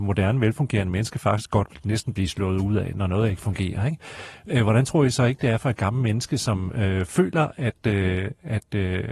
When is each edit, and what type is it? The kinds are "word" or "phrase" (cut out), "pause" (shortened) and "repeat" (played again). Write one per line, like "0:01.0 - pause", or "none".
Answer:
none